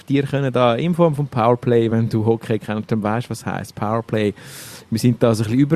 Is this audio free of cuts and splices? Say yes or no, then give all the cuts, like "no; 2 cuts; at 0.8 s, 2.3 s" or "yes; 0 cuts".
yes; 0 cuts